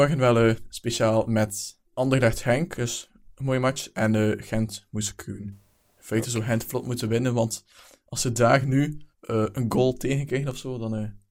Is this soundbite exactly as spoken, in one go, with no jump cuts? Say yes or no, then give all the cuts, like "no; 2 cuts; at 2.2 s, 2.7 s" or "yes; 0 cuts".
no; 2 cuts; at 1.9 s, 9.1 s